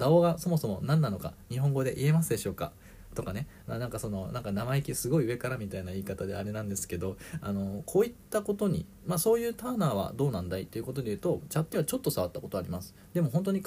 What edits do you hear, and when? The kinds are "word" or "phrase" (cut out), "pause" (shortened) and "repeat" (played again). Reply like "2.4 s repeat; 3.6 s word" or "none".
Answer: 11.7 s word